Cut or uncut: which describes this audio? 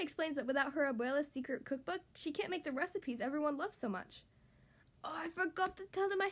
uncut